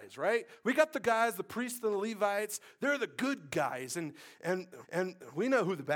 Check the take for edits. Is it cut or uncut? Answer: cut